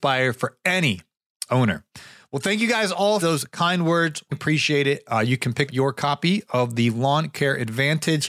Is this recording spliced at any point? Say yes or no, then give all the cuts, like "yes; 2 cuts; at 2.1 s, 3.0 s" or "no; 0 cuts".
yes; 4 cuts; at 1.5 s, 3.2 s, 4.3 s, 5.7 s